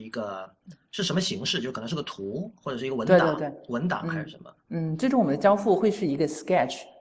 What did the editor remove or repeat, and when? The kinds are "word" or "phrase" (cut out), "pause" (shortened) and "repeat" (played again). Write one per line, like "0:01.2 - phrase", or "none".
0:04.6 - pause